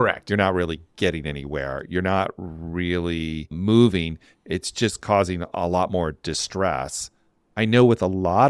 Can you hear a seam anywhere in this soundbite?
no; 0 cuts

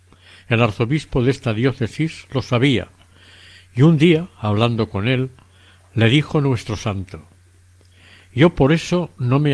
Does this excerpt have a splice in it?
no; 0 cuts

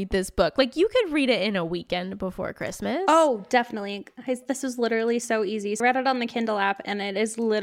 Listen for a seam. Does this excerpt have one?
yes; 1 cut; at 5.8 s

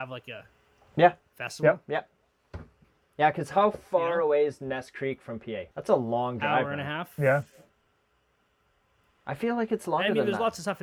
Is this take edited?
yes; 3 cuts; at 1.2 s, 2.8 s, 5.7 s

